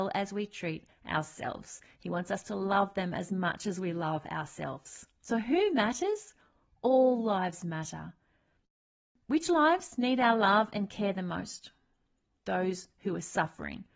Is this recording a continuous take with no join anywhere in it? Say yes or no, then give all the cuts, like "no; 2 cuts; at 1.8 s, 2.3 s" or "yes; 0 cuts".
yes; 0 cuts